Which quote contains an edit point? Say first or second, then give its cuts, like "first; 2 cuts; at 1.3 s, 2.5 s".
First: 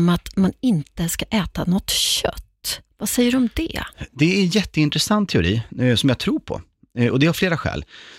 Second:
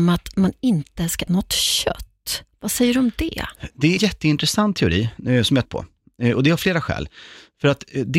second; 3 cuts; at 1.3 s, 4.0 s, 5.6 s